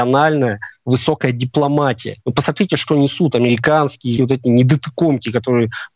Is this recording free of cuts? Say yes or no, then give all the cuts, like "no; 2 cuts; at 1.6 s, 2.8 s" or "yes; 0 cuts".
no; 2 cuts; at 2.2 s, 4.2 s